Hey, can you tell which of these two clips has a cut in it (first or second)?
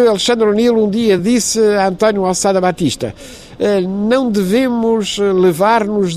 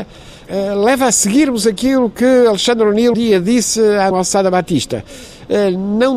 second